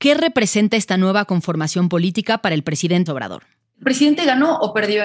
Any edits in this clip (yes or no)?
yes